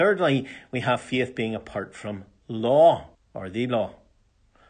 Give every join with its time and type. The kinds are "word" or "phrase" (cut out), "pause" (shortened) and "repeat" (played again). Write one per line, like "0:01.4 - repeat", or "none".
0:03.1 - pause